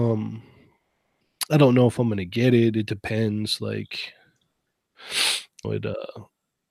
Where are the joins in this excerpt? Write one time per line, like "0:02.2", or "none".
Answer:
0:05.6